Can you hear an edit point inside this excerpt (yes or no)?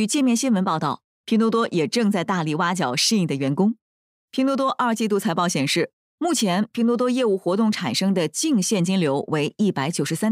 no